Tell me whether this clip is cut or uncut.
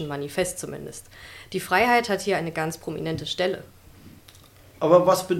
uncut